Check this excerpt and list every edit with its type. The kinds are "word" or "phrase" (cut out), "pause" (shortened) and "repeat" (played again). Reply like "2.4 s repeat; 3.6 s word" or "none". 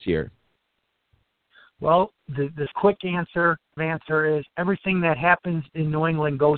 2.7 s phrase; 3.8 s phrase